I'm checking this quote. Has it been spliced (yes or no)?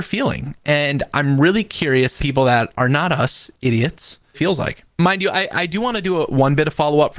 yes